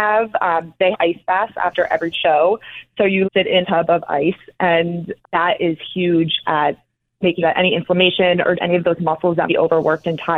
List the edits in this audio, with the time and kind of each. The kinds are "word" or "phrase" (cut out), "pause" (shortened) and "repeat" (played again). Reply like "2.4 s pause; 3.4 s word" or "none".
0.9 s word; 2.1 s word; 3.2 s word; 3.6 s word; 5.2 s word; 7.4 s word; 8.6 s word; 9.5 s word